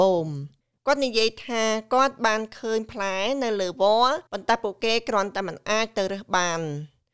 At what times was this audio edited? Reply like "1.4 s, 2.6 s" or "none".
4.3 s